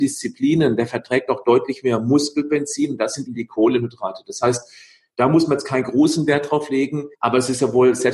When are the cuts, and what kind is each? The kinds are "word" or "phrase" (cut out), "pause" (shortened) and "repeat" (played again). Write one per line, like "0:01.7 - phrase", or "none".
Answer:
0:03.3 - word
0:07.1 - pause